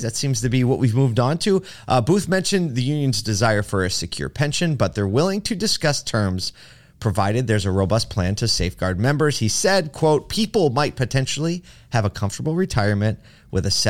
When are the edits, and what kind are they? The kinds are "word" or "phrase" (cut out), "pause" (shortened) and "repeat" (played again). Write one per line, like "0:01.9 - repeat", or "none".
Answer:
none